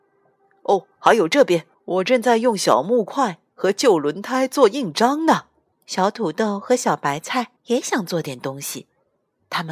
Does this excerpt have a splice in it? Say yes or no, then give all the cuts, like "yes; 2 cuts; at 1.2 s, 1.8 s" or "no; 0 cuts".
yes; 3 cuts; at 1.7 s, 5.7 s, 7.6 s